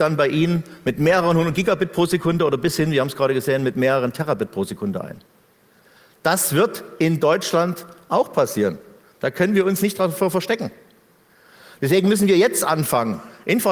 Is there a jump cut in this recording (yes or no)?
no